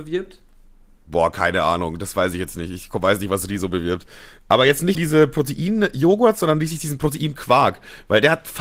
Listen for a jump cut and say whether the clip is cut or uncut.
cut